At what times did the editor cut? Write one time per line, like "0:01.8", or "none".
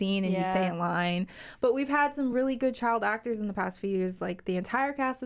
none